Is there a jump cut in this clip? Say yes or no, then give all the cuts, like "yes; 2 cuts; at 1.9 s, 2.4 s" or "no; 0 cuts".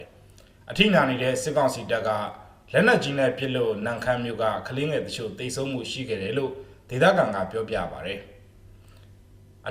no; 0 cuts